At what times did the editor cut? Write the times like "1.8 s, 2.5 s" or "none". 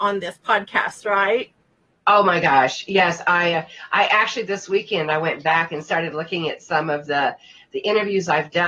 none